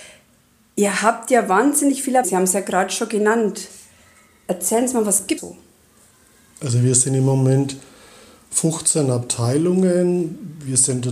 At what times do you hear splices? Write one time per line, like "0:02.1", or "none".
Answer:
0:02.2
0:05.4